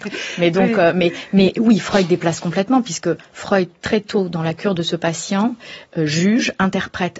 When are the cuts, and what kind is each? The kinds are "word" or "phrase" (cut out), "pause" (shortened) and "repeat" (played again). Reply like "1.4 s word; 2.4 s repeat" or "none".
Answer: none